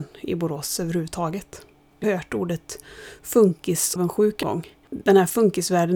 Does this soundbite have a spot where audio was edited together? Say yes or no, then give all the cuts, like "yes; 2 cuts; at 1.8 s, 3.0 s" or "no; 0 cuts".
yes; 4 cuts; at 2.0 s, 4.0 s, 4.4 s, 4.8 s